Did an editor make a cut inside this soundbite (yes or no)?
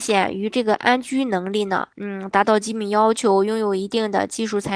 yes